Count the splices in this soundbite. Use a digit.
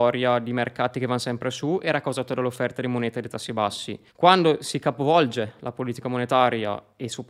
1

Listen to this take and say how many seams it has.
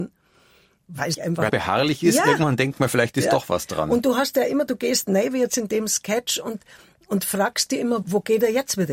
3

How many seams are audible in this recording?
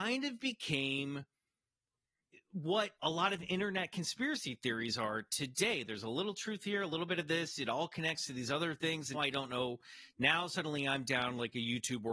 2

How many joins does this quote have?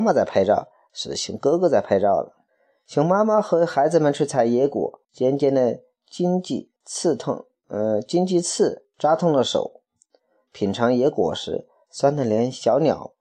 3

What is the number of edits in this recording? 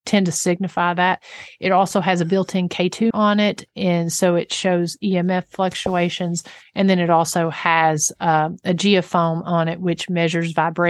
1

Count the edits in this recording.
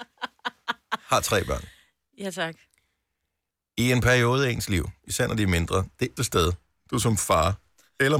1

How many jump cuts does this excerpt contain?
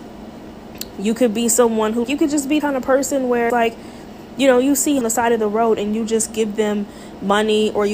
4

